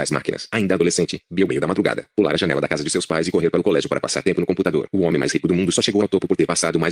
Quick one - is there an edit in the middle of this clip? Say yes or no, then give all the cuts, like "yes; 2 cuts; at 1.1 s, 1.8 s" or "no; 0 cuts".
yes; 1 cut; at 1.5 s